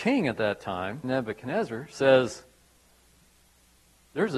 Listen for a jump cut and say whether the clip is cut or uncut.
cut